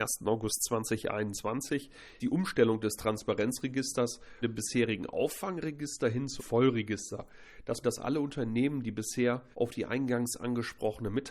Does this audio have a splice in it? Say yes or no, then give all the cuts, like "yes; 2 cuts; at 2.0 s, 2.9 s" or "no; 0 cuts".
yes; 5 cuts; at 2.2 s, 4.4 s, 6.4 s, 7.8 s, 9.5 s